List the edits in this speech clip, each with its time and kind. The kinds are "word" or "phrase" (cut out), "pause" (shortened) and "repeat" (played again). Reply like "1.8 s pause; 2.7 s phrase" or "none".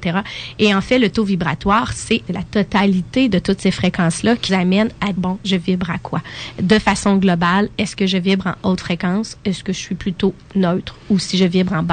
2.3 s phrase; 4.5 s word; 5.1 s word